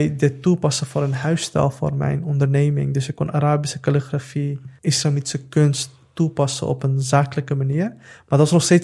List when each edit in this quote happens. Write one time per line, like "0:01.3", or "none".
0:04.8